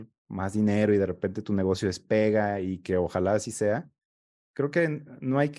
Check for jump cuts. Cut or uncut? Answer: cut